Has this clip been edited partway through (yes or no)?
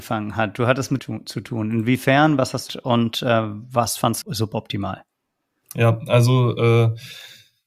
yes